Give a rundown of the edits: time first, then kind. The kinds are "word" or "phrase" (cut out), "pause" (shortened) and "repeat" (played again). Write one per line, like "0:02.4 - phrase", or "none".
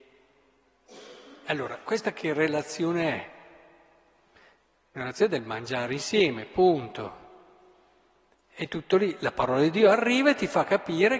none